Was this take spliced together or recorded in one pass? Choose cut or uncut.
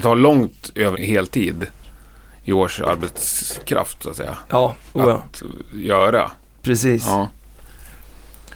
cut